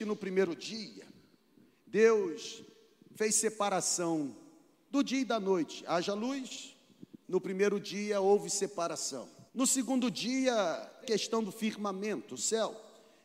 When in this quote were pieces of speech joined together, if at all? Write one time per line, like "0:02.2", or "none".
0:07.2
0:09.5
0:11.0